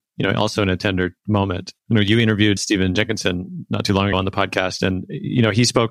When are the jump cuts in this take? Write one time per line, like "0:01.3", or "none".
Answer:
0:01.8
0:02.6
0:04.1

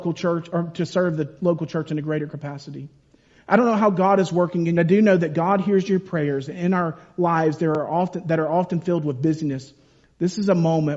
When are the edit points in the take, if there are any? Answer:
0:04.8

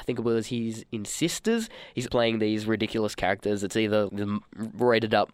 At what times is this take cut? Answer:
0:02.1
0:04.1

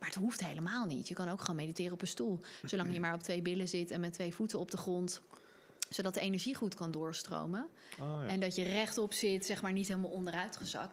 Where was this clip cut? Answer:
none

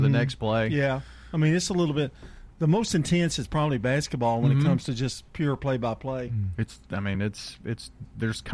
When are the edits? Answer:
none

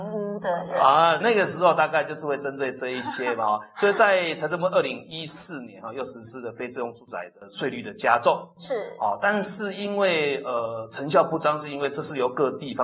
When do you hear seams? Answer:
0:01.2

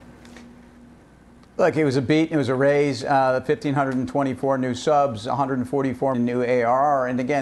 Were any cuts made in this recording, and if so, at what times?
0:06.1

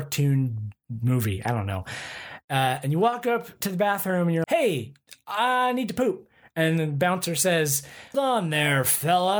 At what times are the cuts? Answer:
0:04.4
0:08.1

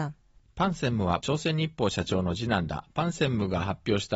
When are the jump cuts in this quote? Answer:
0:01.2

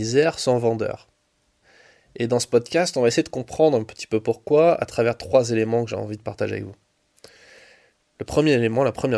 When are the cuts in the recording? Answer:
none

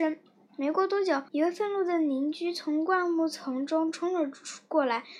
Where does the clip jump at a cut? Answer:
0:01.3

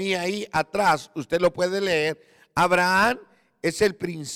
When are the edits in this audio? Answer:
none

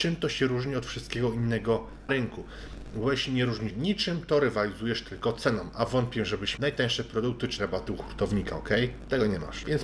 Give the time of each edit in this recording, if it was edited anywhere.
0:02.1
0:03.7
0:06.6
0:07.6

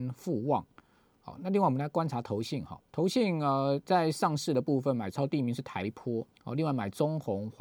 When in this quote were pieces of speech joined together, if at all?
0:02.9
0:06.3

